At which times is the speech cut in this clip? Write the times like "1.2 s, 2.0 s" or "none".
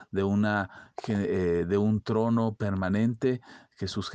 none